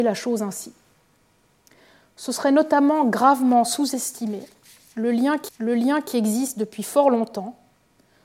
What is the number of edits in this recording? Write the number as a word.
one